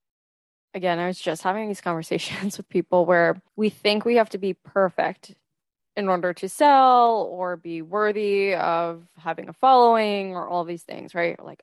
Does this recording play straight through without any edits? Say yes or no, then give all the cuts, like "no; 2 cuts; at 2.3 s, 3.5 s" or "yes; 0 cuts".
no; 1 cut; at 3.5 s